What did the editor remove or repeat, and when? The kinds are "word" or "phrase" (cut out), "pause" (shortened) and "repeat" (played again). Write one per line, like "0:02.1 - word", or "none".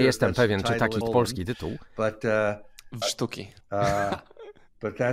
0:01.0 - word
0:03.0 - word
0:03.6 - pause